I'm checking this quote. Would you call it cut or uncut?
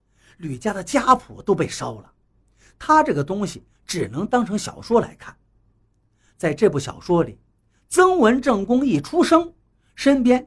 uncut